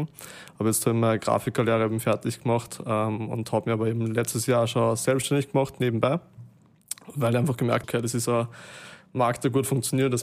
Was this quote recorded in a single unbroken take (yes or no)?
no